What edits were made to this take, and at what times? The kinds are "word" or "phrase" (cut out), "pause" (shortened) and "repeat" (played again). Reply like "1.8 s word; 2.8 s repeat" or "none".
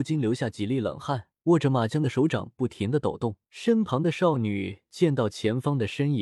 1.4 s pause; 3.4 s pause